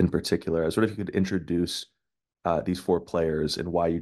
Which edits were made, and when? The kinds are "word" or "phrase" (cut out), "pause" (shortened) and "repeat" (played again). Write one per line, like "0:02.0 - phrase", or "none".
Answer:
none